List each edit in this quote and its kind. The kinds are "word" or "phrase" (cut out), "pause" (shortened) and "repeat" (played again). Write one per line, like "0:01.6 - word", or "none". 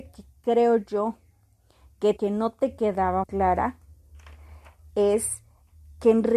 0:02.2 - word
0:03.2 - word

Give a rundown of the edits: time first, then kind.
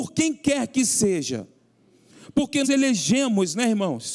0:02.6 - word

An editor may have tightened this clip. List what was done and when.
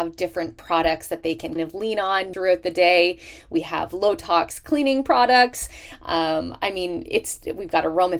0:01.6 - word
0:02.3 - word

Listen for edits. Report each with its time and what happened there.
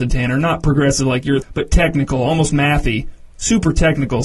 0:01.4 - phrase

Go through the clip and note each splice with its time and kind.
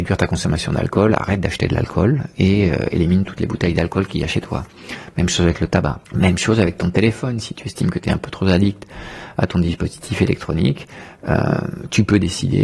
0:06.0 - pause

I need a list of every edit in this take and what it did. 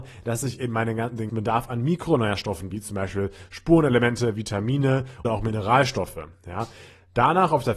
0:01.3 - word
0:02.7 - word
0:05.2 - word

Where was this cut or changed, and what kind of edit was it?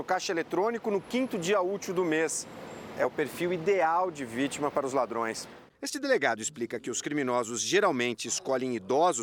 0:05.7 - pause

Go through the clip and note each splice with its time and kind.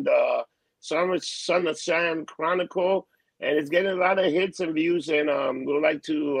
none

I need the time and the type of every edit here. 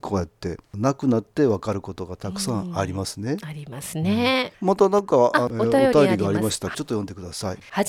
0:06.7 - phrase

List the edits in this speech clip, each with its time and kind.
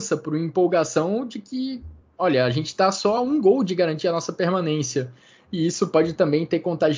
none

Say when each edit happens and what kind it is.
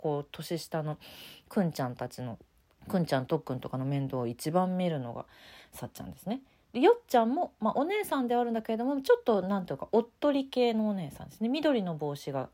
none

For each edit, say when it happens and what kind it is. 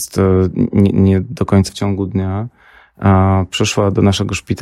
0:01.7 - word

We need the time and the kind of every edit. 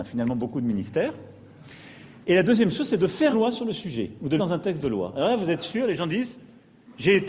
0:02.2 - pause
0:03.3 - word
0:04.4 - word

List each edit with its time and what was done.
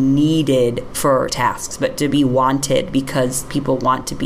0:01.3 - word

